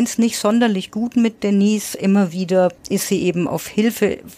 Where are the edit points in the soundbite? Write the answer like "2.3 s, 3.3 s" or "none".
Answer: 2.8 s